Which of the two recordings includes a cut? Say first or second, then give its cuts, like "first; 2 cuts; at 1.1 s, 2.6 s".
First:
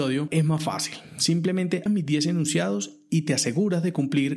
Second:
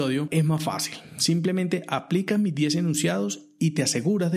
first; 1 cut; at 1.9 s